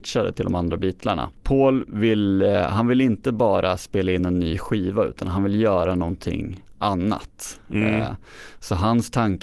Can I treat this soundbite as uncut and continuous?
yes; 0 cuts

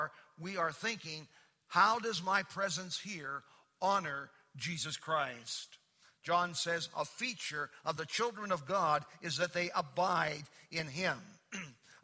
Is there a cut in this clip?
no; 0 cuts

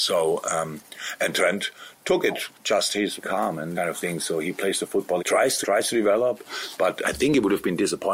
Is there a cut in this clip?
yes; 5 cuts; at 3.2 s, 3.8 s, 5.2 s, 5.6 s, 7.0 s

